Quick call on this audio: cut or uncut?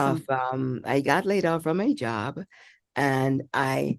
uncut